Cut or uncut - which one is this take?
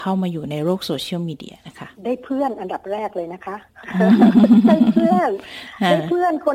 cut